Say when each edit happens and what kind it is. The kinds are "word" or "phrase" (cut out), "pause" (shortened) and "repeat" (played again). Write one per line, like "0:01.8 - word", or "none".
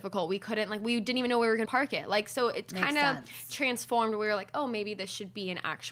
0:01.7 - phrase

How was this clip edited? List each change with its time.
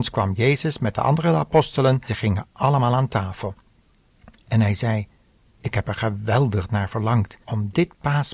0:02.1 - word
0:07.4 - pause

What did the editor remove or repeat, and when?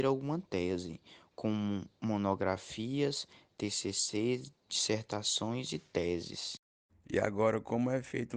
none

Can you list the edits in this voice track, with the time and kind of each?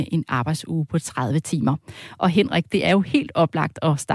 none

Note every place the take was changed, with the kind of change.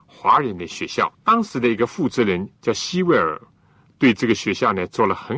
0:01.1 - pause
0:02.6 - pause

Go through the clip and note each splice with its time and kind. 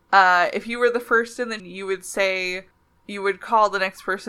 0:01.6 - word
0:02.7 - pause

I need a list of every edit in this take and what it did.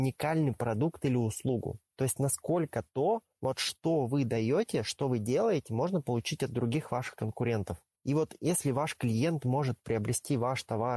none

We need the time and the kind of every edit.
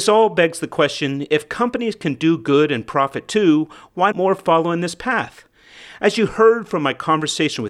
0:04.1 - word

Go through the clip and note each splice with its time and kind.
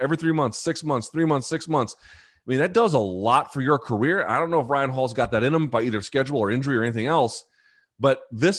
none

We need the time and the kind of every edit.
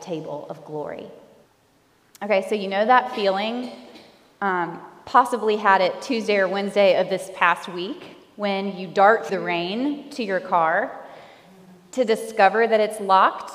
0:01.5 - pause
0:09.3 - word

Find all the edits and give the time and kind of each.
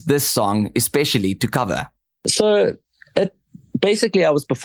none

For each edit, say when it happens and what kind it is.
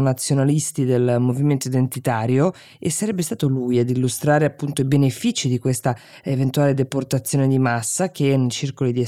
none

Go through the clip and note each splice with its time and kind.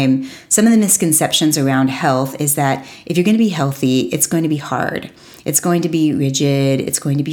none

